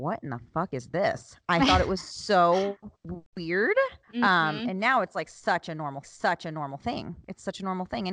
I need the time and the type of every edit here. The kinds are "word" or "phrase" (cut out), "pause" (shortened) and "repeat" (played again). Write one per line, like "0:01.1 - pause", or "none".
0:02.9 - pause
0:04.0 - pause
0:06.0 - repeat

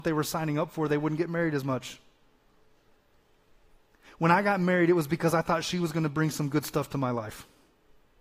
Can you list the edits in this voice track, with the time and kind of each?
none

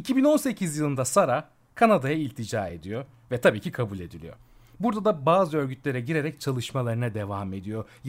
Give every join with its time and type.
none

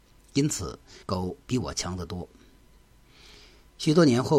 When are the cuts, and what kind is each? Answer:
0:01.0 - pause

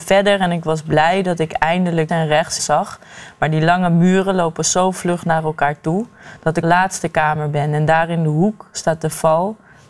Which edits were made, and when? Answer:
0:02.1 - word
0:02.6 - phrase
0:06.6 - phrase

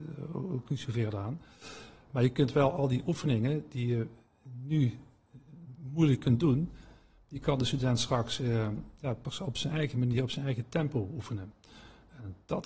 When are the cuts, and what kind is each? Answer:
none

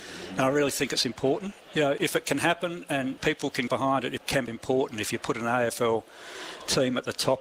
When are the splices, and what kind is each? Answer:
0:01.6 - word
0:02.0 - word
0:03.2 - word
0:03.7 - word
0:04.2 - word
0:04.5 - word

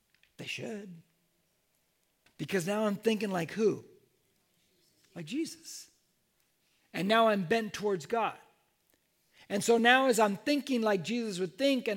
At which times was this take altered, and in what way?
none

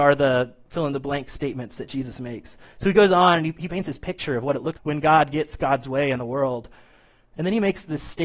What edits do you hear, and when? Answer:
0:04.8 - word

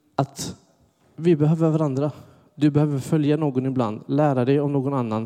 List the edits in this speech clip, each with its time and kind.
none

